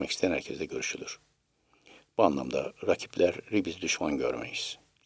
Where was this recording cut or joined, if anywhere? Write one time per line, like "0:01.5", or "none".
none